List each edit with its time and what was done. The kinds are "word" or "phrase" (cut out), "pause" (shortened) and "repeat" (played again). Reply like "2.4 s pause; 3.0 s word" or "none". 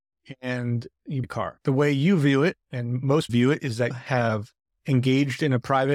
1.2 s word; 2.6 s pause; 3.3 s word; 3.9 s word